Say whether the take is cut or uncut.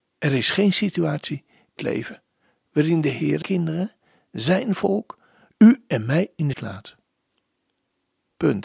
cut